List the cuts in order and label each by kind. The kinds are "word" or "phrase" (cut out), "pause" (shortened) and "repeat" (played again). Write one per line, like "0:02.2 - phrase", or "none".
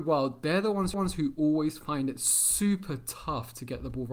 0:00.9 - repeat